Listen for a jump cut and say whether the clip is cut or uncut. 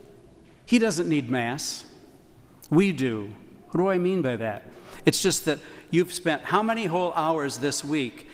uncut